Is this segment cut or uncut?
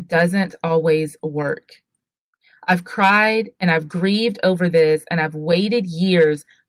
uncut